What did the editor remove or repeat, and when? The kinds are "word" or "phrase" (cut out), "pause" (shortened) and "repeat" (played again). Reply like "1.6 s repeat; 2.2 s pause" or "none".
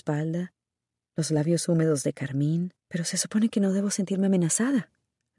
2.8 s pause